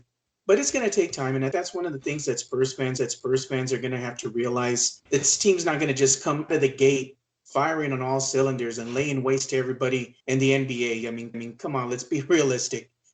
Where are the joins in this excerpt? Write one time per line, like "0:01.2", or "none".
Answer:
0:01.5
0:03.0
0:05.1
0:06.5
0:10.2
0:11.3